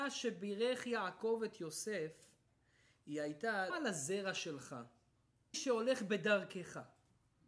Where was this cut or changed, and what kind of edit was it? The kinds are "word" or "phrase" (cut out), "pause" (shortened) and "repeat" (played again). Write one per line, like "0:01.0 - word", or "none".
0:03.7 - word
0:05.5 - phrase